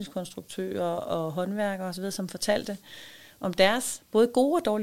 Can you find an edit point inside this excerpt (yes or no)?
no